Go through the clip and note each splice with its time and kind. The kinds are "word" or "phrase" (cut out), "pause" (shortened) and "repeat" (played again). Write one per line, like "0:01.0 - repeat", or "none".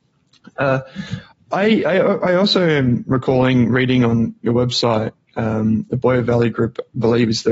0:01.3 - pause